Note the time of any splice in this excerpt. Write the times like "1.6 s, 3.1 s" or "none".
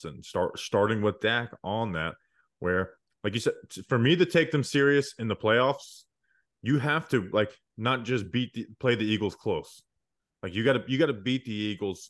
none